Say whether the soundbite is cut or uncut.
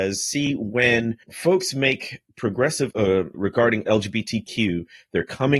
cut